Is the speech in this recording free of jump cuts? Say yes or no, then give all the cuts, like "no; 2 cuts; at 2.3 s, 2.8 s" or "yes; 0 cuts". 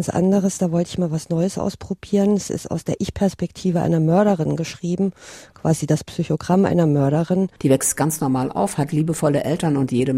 yes; 0 cuts